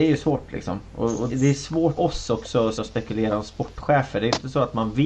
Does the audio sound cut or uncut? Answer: cut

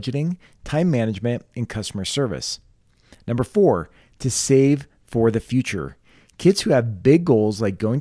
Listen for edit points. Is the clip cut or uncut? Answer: uncut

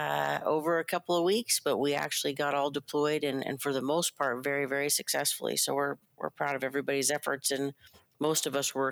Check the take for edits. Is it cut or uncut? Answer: uncut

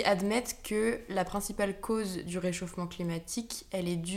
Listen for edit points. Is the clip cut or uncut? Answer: uncut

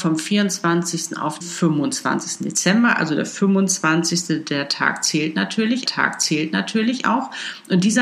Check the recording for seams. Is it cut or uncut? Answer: cut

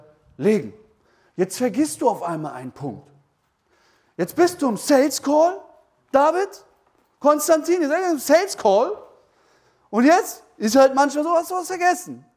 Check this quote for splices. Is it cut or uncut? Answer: uncut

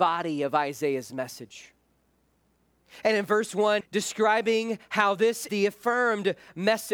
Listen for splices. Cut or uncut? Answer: cut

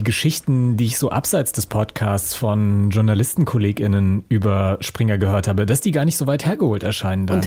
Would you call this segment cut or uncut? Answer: uncut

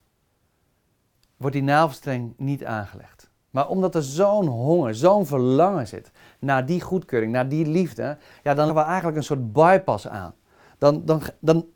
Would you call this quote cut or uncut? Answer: cut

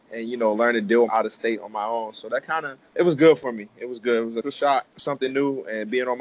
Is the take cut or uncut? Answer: cut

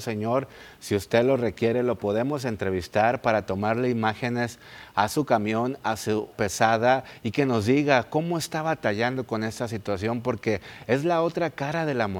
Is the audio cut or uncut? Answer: cut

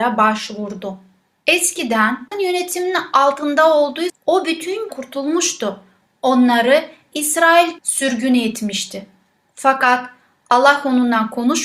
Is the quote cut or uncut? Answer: cut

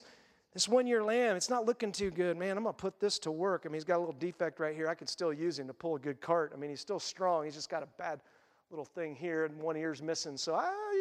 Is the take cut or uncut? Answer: uncut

